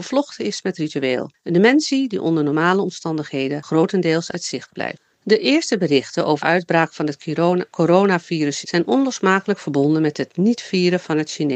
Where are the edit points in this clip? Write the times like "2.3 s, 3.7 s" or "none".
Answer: 4.3 s, 6.4 s, 8.6 s